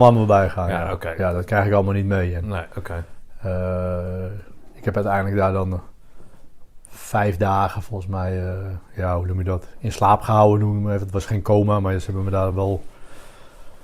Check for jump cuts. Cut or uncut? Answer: uncut